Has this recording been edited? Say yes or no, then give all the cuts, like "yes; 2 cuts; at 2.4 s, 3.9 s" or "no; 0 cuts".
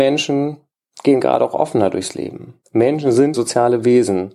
yes; 2 cuts; at 2.6 s, 3.3 s